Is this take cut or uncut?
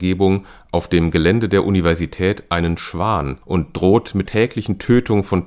cut